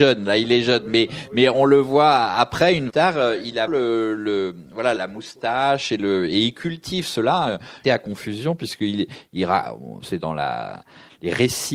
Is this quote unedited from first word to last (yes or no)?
no